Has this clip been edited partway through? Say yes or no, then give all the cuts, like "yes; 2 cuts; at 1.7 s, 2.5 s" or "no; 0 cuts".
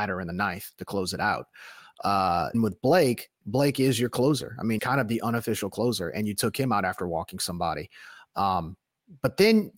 yes; 2 cuts; at 2.5 s, 4.8 s